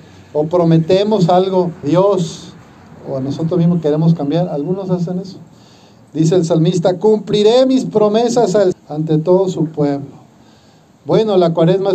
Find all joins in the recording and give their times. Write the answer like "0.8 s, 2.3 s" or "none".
1.8 s, 8.7 s